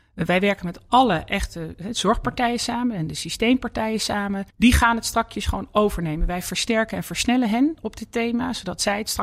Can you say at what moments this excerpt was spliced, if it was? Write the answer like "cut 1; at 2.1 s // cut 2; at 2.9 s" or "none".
cut 1; at 4.5 s